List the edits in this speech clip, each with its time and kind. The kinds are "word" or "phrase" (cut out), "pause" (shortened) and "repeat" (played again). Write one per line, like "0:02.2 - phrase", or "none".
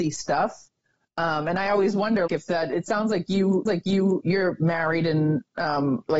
0:02.3 - word
0:03.7 - repeat